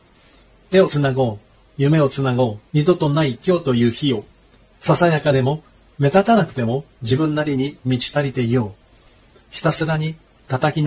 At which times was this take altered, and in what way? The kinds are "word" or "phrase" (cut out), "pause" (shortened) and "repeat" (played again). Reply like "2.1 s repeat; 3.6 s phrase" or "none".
2.7 s pause